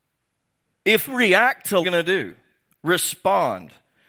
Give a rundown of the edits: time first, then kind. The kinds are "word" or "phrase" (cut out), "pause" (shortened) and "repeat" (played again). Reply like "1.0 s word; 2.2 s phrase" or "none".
1.1 s word; 1.8 s phrase